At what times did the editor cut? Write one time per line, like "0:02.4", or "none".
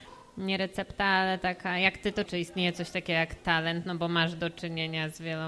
0:02.3